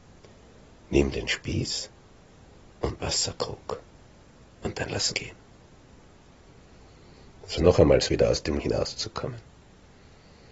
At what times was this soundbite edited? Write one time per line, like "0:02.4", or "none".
0:03.0
0:05.1
0:07.6
0:08.1
0:08.6